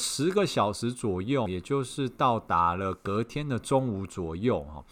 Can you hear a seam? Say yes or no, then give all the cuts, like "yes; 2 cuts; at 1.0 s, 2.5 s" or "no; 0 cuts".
yes; 1 cut; at 1.5 s